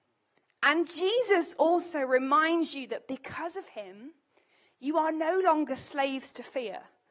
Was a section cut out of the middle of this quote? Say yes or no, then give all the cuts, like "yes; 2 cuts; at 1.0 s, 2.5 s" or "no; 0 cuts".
no; 0 cuts